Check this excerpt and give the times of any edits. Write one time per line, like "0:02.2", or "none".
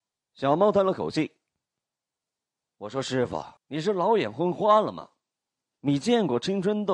0:03.6